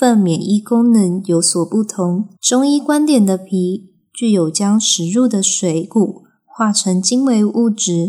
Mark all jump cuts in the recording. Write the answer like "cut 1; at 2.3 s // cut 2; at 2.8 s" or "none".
cut 1; at 2.4 s